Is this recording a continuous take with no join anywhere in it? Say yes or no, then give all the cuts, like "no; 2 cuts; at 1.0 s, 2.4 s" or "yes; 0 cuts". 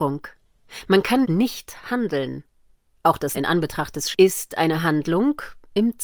no; 3 cuts; at 1.2 s, 3.3 s, 4.1 s